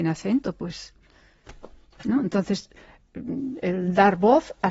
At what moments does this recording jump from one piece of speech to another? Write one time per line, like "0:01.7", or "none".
none